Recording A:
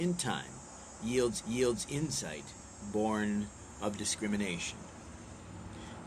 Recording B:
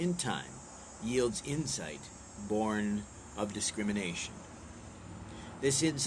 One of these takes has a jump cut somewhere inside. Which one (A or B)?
A